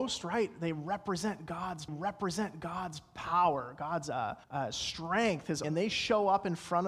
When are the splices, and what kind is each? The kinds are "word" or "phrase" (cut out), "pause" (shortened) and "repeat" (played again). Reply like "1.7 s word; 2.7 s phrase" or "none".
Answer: 1.9 s repeat; 4.4 s pause; 5.6 s word